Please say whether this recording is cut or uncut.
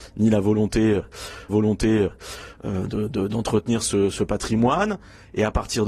cut